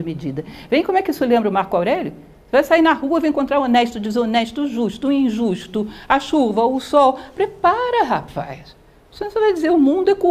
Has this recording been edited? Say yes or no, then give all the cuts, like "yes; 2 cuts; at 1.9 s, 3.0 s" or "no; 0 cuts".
no; 0 cuts